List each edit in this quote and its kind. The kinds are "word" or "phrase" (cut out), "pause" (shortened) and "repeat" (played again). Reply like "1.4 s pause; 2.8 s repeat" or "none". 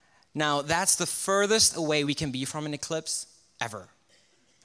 none